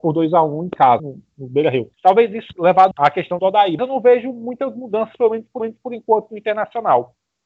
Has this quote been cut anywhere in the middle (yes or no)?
yes